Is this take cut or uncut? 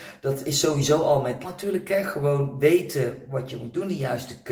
cut